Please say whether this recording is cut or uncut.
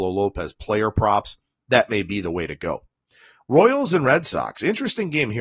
uncut